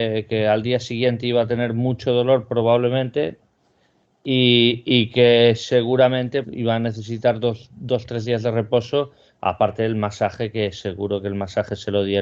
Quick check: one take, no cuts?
no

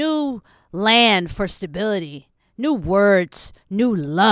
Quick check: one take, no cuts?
yes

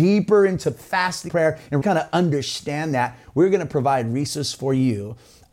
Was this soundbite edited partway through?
yes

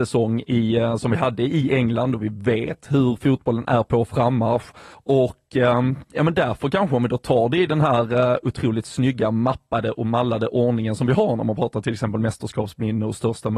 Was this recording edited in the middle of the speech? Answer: yes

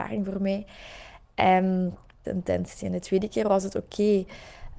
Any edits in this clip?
yes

